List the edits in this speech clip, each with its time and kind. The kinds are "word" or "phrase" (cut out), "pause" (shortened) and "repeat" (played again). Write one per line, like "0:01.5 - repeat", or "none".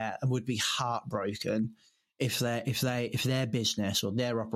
none